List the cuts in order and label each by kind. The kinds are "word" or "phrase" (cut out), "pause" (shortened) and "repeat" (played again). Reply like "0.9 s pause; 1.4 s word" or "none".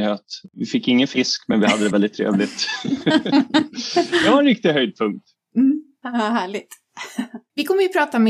none